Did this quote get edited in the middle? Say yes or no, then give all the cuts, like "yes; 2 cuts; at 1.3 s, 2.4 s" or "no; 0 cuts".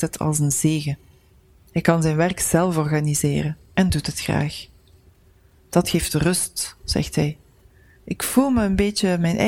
no; 0 cuts